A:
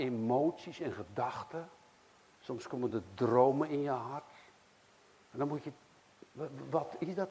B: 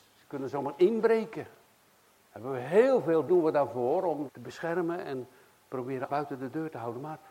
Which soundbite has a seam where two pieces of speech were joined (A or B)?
B